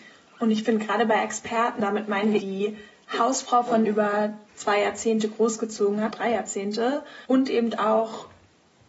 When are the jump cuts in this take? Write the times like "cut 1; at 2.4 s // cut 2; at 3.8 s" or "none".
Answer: cut 1; at 1.8 s // cut 2; at 2.4 s // cut 3; at 3.8 s // cut 4; at 4.5 s // cut 5; at 6.1 s // cut 6; at 7.2 s